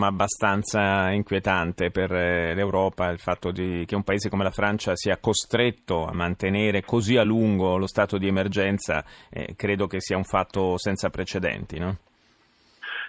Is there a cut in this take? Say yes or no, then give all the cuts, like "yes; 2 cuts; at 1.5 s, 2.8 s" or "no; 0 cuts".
no; 0 cuts